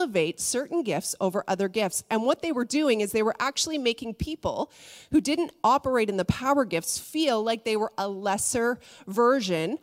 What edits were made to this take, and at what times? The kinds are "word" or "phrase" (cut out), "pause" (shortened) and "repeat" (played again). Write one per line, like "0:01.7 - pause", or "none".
none